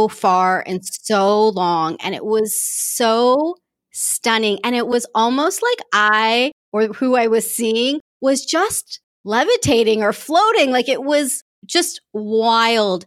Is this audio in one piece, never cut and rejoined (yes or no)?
yes